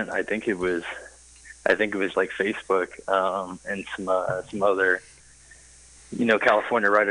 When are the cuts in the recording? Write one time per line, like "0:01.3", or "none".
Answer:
0:02.1